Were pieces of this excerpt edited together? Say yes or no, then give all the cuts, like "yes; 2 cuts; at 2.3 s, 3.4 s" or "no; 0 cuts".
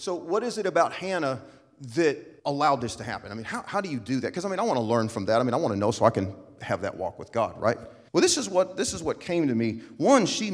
yes; 2 cuts; at 2.4 s, 8.1 s